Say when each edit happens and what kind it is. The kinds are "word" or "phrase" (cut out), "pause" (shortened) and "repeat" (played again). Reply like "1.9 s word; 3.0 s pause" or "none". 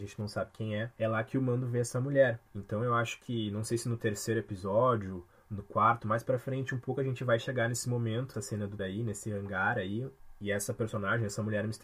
0.9 s pause; 2.5 s pause; 8.3 s word; 8.8 s word